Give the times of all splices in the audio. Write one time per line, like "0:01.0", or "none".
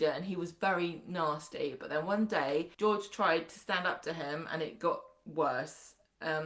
0:02.7